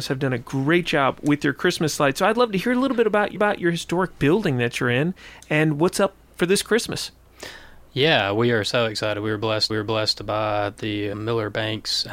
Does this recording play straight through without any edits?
no; 4 cuts; at 3.4 s, 6.3 s, 9.7 s, 11.1 s

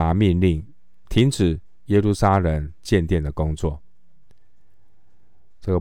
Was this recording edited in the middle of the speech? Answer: yes; 1 cut; at 1.1 s

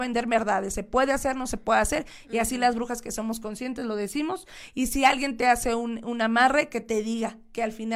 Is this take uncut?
yes; 0 cuts

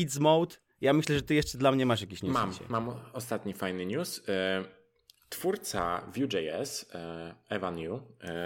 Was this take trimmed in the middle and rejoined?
no; 0 cuts

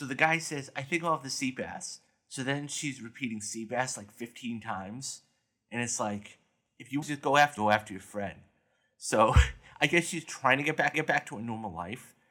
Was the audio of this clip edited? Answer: yes; 3 cuts; at 7.0 s, 7.6 s, 10.9 s

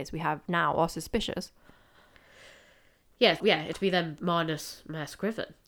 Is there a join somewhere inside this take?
yes; 3 cuts; at 3.4 s, 3.7 s, 4.2 s

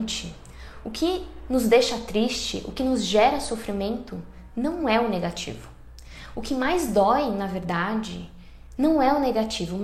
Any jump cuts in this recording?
no; 0 cuts

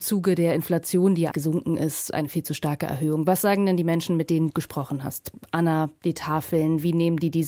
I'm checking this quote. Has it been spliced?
yes; 2 cuts; at 1.3 s, 4.5 s

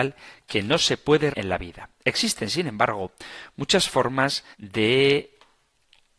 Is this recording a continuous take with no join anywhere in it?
no; 2 cuts; at 1.3 s, 4.5 s

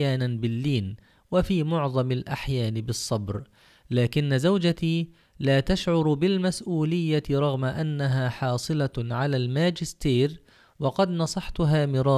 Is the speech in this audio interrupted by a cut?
no; 0 cuts

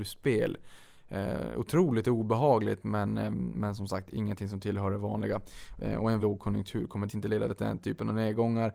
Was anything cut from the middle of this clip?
yes; 3 cuts; at 3.5 s, 6.2 s, 7.1 s

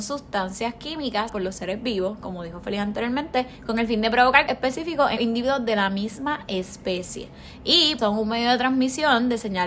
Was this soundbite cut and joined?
yes; 5 cuts; at 1.3 s, 3.5 s, 4.5 s, 5.2 s, 8.0 s

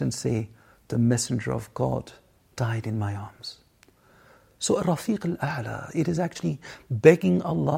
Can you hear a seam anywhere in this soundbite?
no; 0 cuts

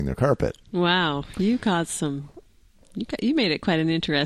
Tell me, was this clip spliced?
no; 0 cuts

